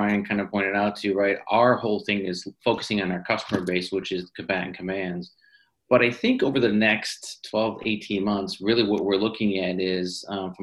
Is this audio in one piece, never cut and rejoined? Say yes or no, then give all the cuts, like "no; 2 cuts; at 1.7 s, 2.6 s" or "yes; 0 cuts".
yes; 0 cuts